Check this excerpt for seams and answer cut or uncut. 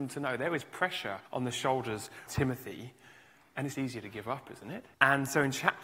cut